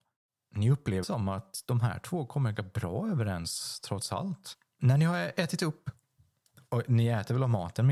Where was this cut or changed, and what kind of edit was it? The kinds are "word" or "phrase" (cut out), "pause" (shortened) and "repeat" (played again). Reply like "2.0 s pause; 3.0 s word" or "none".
1.0 s word; 2.5 s word; 6.2 s pause